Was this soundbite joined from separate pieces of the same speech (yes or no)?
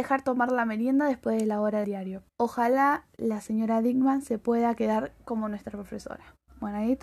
yes